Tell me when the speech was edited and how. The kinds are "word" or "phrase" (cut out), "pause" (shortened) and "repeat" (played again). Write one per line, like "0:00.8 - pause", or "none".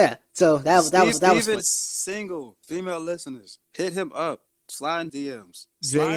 0:01.1 - repeat
0:01.6 - word
0:03.6 - pause
0:04.5 - pause
0:05.1 - word